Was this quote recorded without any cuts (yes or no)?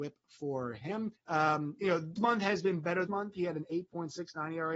no